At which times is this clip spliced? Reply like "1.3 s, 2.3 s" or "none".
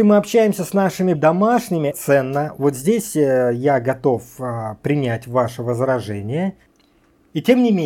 1.1 s, 1.9 s